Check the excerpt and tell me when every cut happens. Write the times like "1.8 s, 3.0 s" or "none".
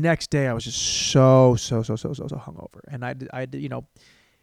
2.3 s